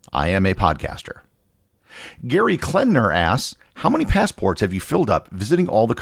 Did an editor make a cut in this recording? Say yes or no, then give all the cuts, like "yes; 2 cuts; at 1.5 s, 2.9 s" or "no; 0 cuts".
no; 0 cuts